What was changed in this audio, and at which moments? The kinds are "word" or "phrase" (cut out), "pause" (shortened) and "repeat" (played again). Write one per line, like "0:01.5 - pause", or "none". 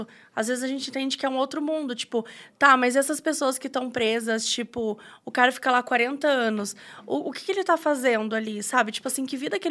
none